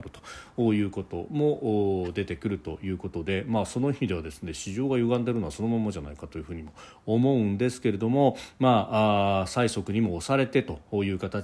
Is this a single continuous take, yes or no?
yes